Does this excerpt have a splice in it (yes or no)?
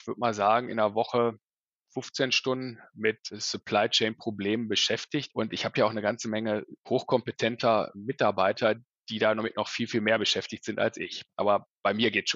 no